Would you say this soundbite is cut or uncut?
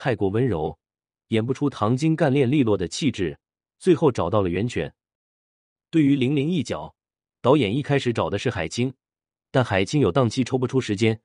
uncut